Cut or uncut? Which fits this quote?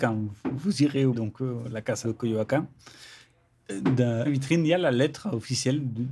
cut